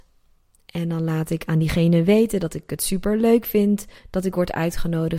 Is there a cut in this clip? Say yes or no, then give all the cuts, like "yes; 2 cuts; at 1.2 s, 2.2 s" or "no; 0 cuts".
yes; 1 cut; at 4.0 s